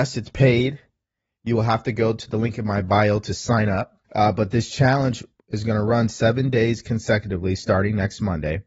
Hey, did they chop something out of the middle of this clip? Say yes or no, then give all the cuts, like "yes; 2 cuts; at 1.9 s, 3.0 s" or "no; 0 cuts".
yes; 1 cut; at 4.0 s